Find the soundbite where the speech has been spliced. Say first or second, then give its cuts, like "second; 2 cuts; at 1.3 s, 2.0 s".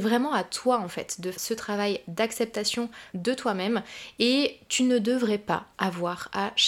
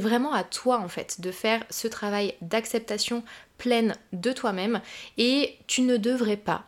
first; 3 cuts; at 1.3 s, 3.1 s, 5.7 s